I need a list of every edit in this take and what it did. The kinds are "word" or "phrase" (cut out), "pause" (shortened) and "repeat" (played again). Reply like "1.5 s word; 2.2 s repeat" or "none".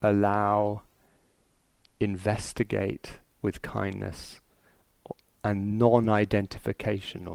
none